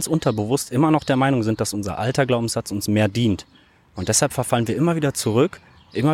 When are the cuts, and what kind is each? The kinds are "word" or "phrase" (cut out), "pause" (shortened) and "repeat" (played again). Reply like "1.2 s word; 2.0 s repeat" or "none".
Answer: none